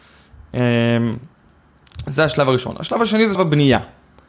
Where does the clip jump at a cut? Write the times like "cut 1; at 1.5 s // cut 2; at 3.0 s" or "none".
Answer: cut 1; at 3.3 s